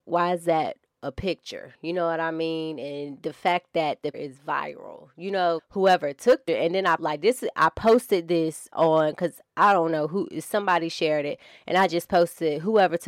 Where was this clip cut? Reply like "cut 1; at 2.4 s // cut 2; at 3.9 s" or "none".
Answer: cut 1; at 4.1 s // cut 2; at 5.6 s // cut 3; at 6.5 s // cut 4; at 7.0 s